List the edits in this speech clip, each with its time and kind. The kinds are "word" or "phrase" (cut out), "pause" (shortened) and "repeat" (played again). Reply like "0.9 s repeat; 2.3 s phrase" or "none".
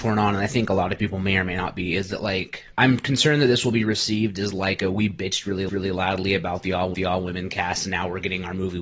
2.7 s pause; 5.7 s repeat; 6.9 s repeat